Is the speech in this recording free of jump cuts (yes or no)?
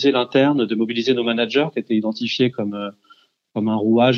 yes